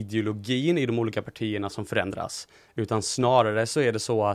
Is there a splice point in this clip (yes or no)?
no